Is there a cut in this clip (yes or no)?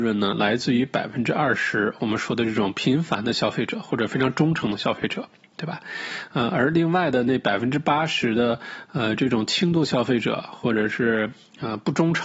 no